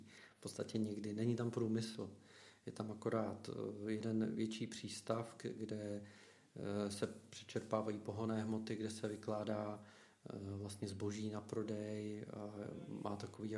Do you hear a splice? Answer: no; 0 cuts

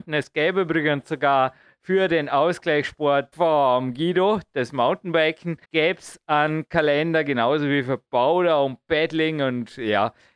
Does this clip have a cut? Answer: yes; 2 cuts; at 3.3 s, 5.6 s

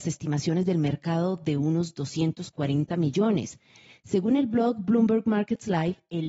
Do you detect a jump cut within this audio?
no; 0 cuts

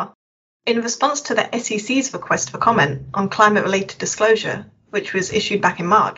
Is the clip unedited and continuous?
yes; 0 cuts

